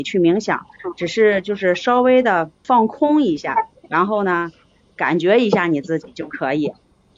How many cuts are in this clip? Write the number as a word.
one